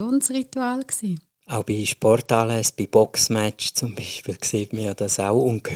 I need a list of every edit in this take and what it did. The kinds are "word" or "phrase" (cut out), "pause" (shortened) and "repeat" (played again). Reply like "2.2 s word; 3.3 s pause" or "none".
1.3 s pause

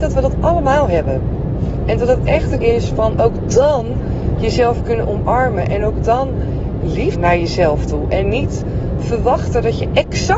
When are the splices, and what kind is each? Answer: 2.6 s word; 7.1 s word

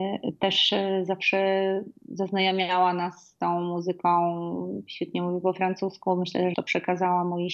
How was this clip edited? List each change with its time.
6.5 s phrase

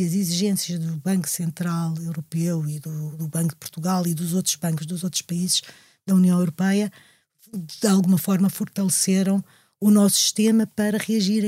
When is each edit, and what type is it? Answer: none

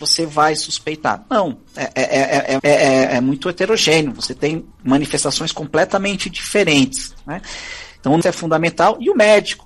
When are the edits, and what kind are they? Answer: 2.6 s word; 4.7 s pause; 8.2 s word

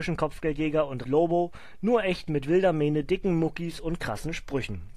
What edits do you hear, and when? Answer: 1.0 s word

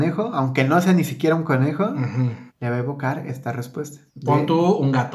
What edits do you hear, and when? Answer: 2.5 s pause; 4.1 s pause

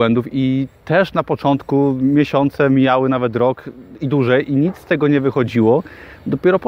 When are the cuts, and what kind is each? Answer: none

